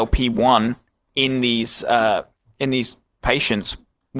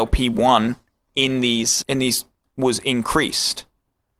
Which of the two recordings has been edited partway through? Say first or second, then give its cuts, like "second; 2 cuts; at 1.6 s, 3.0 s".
second; 2 cuts; at 1.8 s, 2.4 s